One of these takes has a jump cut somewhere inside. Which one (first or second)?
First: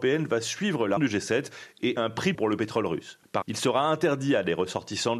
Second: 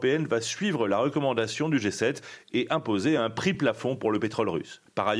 first